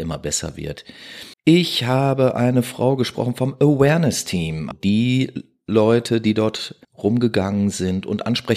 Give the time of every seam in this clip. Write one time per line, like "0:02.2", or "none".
0:01.3
0:04.7
0:06.8